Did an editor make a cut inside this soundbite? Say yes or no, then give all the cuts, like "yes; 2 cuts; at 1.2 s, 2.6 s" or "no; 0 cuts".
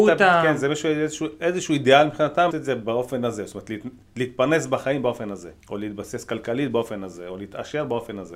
yes; 2 cuts; at 2.5 s, 5.6 s